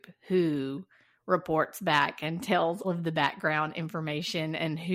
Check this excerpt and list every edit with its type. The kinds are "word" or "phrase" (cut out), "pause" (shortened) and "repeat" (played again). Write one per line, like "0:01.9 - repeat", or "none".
0:02.8 - word